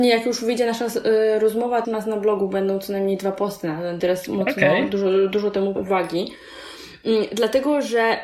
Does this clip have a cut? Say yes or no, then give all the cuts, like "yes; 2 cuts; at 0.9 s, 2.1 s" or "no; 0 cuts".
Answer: yes; 3 cuts; at 1.8 s, 4.0 s, 5.8 s